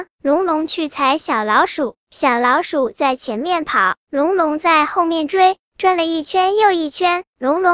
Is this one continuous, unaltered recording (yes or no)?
yes